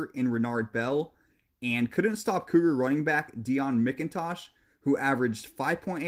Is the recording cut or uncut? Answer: uncut